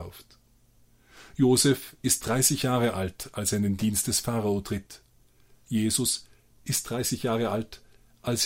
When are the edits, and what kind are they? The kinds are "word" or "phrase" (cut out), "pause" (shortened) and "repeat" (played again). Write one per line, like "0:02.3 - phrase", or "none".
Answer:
none